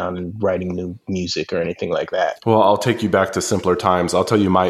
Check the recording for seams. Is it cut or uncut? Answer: uncut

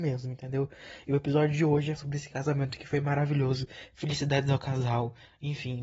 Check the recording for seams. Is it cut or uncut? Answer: cut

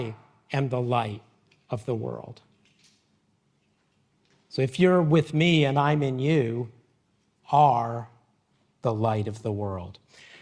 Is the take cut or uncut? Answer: cut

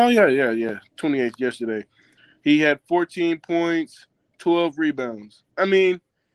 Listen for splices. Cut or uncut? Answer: uncut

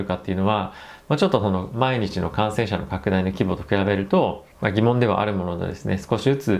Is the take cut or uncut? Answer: cut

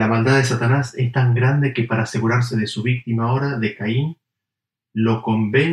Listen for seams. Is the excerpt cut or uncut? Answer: uncut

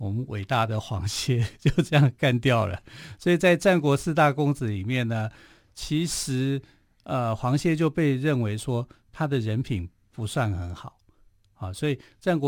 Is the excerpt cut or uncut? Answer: uncut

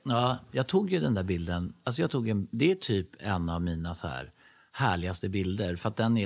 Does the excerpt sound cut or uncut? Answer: uncut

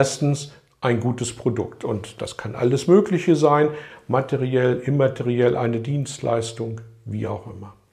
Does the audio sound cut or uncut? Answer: uncut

